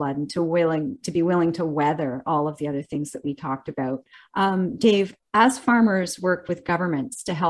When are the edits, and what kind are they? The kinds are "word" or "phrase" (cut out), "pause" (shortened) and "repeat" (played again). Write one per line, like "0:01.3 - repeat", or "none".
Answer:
0:04.1 - pause